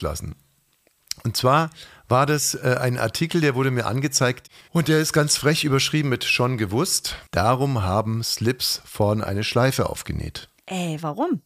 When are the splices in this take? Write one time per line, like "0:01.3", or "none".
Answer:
0:04.6
0:07.3